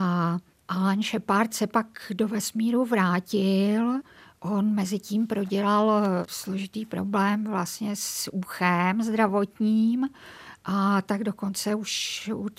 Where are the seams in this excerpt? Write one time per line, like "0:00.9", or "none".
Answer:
none